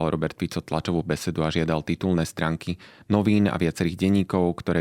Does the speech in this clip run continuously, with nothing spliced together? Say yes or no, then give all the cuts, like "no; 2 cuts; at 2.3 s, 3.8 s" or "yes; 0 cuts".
yes; 0 cuts